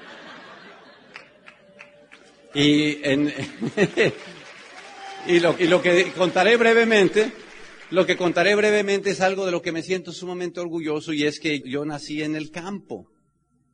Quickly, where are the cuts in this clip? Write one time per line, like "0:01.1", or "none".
0:05.6
0:11.6